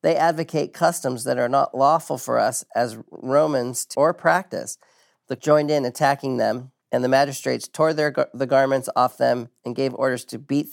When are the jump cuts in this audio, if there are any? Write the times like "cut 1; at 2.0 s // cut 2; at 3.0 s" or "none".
cut 1; at 3.9 s // cut 2; at 5.4 s // cut 3; at 6.8 s